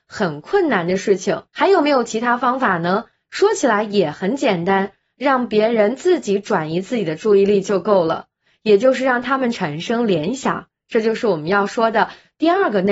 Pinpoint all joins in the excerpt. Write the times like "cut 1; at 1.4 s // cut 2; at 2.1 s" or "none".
cut 1; at 1.5 s